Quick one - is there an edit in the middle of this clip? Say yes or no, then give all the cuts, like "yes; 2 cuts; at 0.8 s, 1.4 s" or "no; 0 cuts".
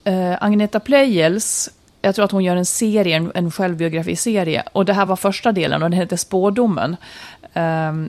no; 0 cuts